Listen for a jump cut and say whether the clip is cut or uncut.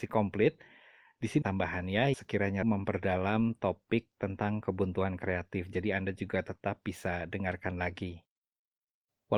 cut